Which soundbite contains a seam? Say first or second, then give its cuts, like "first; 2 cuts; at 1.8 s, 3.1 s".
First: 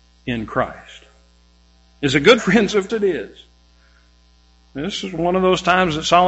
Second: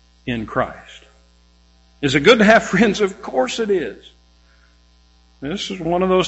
first; 2 cuts; at 2.4 s, 2.9 s